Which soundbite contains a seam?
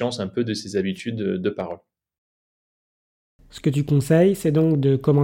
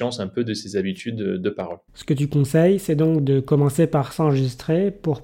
second; 1 cut; at 1.9 s

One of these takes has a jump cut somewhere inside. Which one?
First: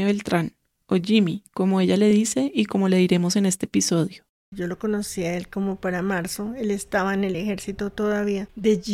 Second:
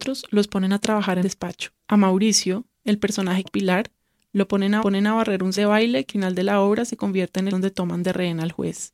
second; 8 cuts; at 1.2 s, 1.8 s, 2.7 s, 3.5 s, 4.8 s, 5.6 s, 6.1 s, 7.5 s

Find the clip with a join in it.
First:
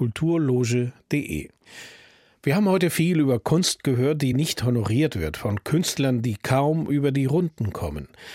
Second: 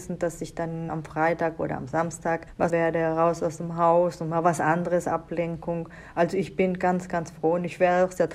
second; 1 cut; at 2.7 s

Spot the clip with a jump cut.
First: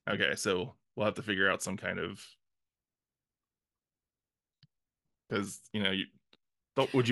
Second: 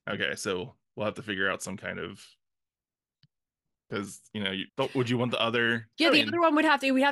second; 3 cuts; at 3.1 s, 4.7 s, 5.9 s

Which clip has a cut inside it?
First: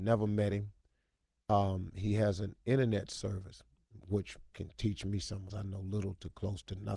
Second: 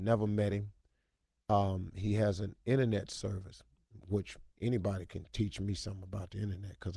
first; 2 cuts; at 4.5 s, 5.5 s

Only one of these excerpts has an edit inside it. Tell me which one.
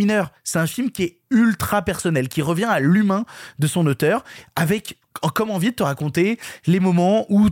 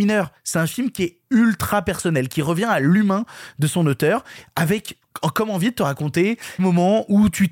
second; 1 cut; at 6.6 s

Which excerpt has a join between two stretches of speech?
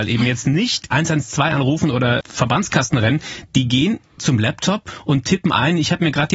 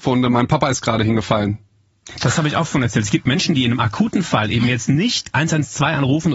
first; 1 cut; at 2.2 s

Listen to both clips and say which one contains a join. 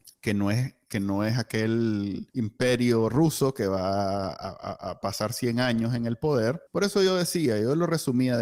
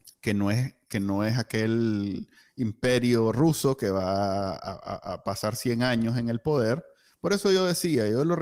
first; 2 cuts; at 2.3 s, 6.7 s

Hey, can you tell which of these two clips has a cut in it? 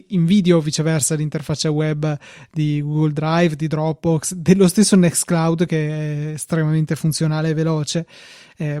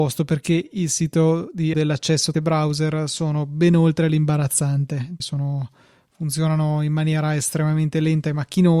second; 3 cuts; at 1.7 s, 2.3 s, 5.2 s

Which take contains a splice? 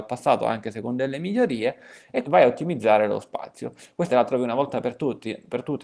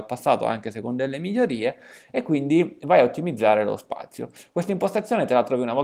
first; 2 cuts; at 2.2 s, 4.1 s

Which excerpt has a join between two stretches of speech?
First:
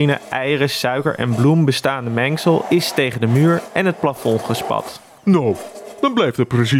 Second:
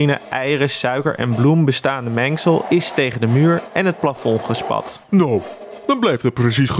second; 1 cut; at 5.0 s

